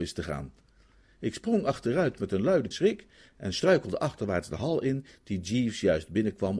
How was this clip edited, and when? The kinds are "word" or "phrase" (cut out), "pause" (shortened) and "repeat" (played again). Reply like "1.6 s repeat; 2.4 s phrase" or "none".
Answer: 2.7 s phrase